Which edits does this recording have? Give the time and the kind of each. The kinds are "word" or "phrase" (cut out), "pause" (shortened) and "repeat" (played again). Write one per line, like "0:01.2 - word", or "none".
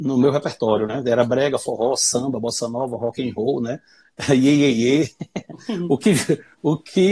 none